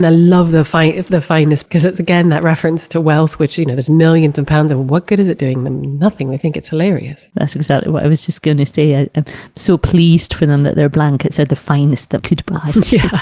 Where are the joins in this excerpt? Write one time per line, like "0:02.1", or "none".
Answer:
0:01.7
0:12.2